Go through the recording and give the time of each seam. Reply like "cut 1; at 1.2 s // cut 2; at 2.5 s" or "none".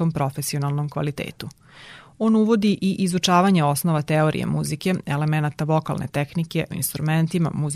cut 1; at 6.7 s